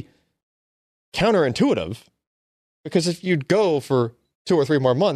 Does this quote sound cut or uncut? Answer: uncut